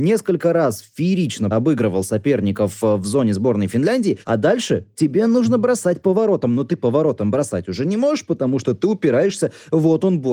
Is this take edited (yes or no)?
yes